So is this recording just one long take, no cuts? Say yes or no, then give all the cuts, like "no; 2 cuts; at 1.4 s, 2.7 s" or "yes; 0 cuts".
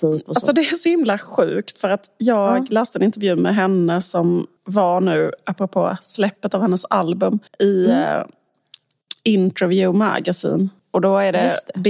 no; 3 cuts; at 4.6 s, 7.5 s, 10.8 s